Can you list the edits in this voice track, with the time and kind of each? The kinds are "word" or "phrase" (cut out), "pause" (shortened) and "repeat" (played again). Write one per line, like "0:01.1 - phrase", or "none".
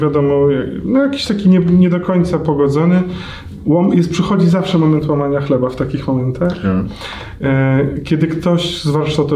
none

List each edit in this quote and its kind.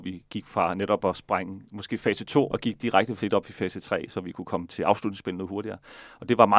0:02.5 - word
0:03.2 - word

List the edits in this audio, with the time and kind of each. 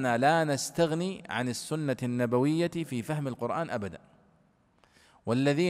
none

